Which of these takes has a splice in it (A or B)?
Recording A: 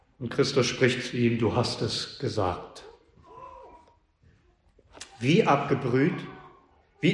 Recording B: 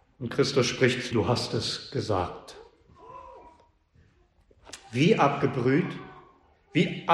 B